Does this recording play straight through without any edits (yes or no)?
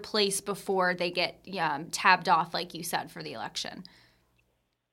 yes